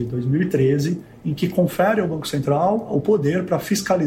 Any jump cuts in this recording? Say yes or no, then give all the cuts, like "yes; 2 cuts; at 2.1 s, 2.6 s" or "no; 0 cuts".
no; 0 cuts